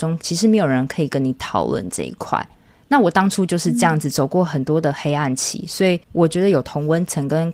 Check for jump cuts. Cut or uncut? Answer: cut